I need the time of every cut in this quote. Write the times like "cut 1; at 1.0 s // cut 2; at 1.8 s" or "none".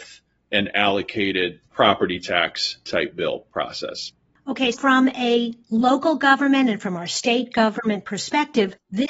cut 1; at 1.7 s // cut 2; at 4.7 s